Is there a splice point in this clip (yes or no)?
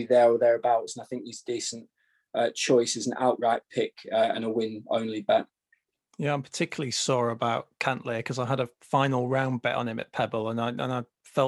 no